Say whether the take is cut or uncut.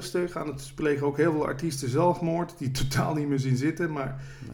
uncut